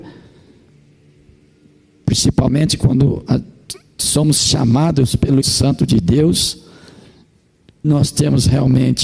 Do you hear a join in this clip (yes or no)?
yes